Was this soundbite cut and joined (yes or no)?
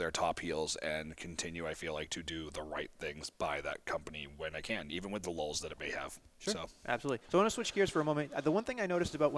yes